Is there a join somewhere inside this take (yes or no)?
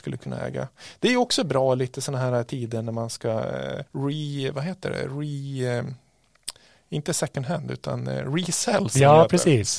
yes